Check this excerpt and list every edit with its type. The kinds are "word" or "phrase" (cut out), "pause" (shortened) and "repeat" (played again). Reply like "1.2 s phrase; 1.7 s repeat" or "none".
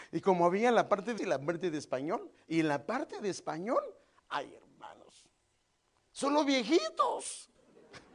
1.2 s word